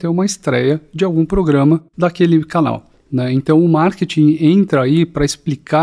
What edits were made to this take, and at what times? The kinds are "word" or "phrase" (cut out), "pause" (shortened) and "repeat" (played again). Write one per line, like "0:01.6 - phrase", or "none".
0:01.9 - pause

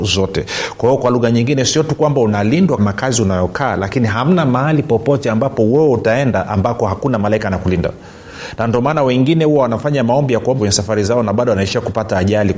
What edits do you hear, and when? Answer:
0:02.8 - word
0:10.6 - word

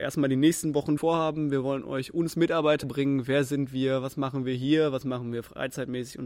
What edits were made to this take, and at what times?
0:01.0 - word
0:02.8 - phrase

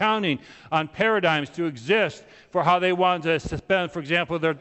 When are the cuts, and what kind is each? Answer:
none

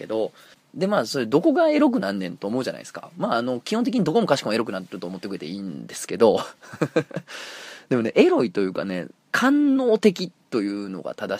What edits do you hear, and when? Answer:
0:09.2 - pause

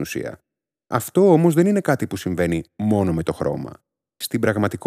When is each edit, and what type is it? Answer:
none

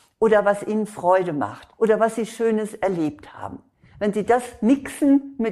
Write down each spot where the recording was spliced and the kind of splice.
0:01.7 - pause

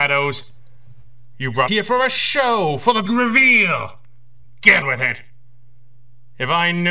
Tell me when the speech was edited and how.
0:01.7 - word
0:03.1 - word
0:04.8 - word

